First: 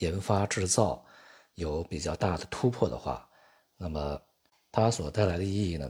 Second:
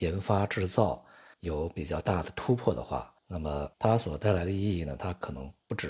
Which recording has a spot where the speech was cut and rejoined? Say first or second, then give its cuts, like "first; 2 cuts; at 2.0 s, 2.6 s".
second; 3 cuts; at 1.3 s, 3.2 s, 3.7 s